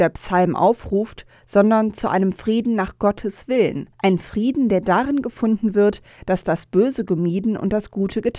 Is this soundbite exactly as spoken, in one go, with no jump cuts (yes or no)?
no